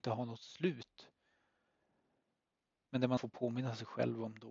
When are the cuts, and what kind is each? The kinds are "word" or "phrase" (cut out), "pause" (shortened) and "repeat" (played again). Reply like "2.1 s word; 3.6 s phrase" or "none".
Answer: 3.2 s word